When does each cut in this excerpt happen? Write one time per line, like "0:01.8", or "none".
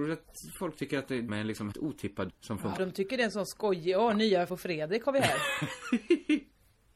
0:01.3
0:01.7
0:02.3
0:02.8
0:04.5